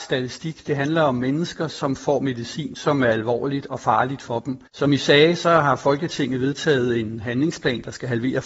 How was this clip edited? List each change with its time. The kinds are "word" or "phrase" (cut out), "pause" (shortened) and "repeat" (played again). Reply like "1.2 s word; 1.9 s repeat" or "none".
4.7 s pause